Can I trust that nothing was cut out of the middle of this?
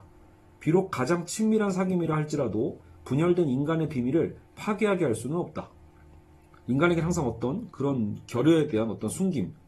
yes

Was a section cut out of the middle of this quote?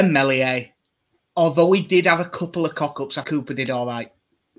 yes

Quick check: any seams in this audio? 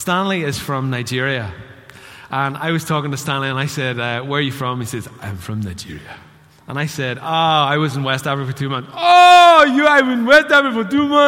no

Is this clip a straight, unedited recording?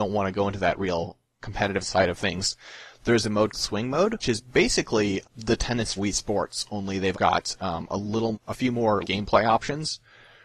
no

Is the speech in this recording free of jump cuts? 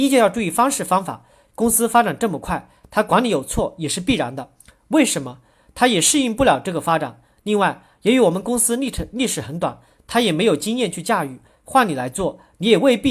yes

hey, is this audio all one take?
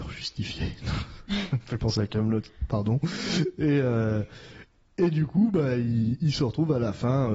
yes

